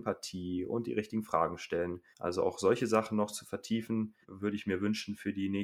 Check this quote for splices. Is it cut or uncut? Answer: cut